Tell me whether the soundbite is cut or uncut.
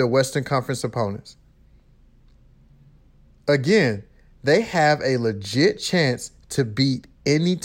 uncut